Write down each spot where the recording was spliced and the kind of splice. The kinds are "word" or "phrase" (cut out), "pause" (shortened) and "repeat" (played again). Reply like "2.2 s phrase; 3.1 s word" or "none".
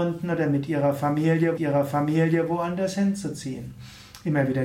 1.6 s repeat